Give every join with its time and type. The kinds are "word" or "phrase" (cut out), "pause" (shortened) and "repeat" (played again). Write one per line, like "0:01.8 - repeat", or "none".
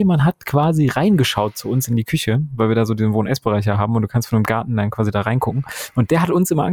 none